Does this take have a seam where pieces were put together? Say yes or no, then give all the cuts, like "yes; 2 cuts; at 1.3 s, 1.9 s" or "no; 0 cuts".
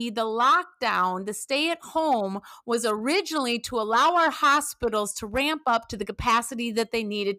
no; 0 cuts